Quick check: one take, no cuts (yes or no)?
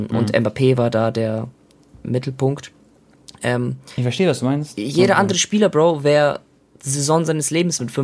yes